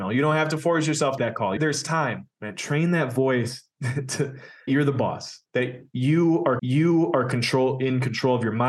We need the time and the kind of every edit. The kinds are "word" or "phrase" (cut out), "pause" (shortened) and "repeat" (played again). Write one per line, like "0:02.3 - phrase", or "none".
0:01.2 - phrase
0:01.6 - phrase
0:02.3 - pause
0:04.7 - word
0:05.5 - pause
0:06.6 - repeat